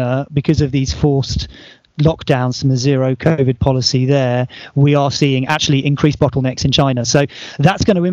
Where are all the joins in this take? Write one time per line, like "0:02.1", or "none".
none

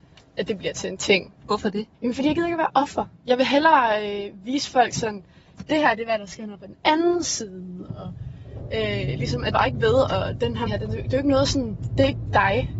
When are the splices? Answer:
0:01.4
0:01.9
0:03.2
0:06.5
0:09.5
0:10.7

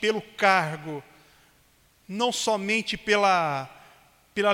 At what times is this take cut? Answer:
none

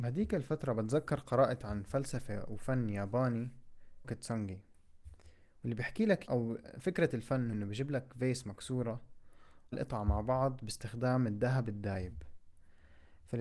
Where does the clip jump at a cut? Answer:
0:04.0
0:06.3
0:07.5
0:09.7

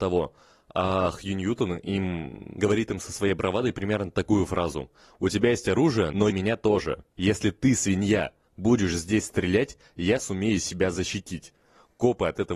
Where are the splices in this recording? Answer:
0:06.3

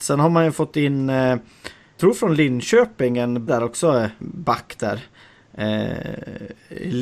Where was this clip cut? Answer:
0:02.0
0:03.5
0:04.2

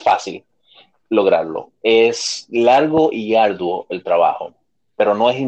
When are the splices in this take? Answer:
none

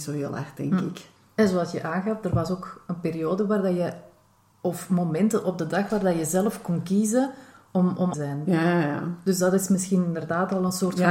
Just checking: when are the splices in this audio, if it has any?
0:01.2
0:08.1

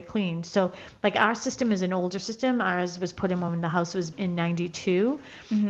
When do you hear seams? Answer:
0:04.1

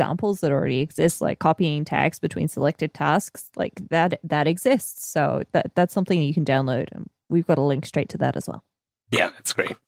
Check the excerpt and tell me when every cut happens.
none

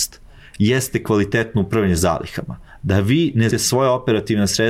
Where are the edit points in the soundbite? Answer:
0:03.5

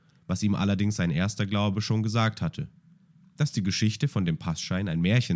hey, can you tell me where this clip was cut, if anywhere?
none

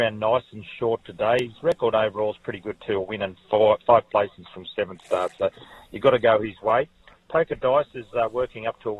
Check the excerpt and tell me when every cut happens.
none

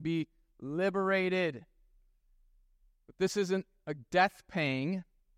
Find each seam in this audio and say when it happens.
none

